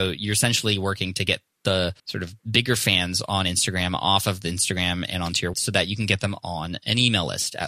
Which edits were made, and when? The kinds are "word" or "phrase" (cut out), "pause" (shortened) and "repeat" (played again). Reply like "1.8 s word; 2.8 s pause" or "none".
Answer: 2.0 s pause; 2.4 s pause; 5.5 s word

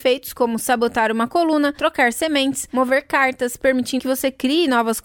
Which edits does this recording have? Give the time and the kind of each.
4.0 s word

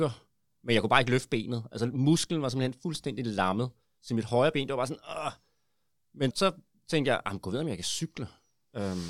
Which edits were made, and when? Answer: 6.3 s word

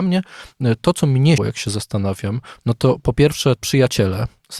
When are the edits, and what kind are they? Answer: 1.4 s word; 3.6 s word

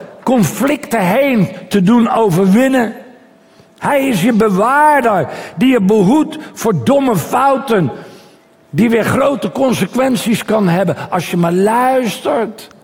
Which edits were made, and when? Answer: none

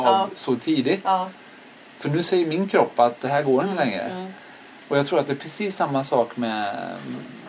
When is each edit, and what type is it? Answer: none

